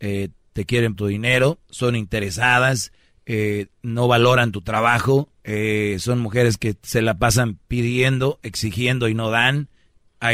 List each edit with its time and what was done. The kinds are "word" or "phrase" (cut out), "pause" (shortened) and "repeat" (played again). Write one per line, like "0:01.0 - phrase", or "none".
0:00.9 - word
0:05.4 - pause